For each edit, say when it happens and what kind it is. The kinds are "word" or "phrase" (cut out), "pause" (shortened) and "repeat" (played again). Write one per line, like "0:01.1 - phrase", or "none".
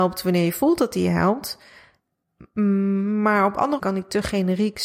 0:03.8 - word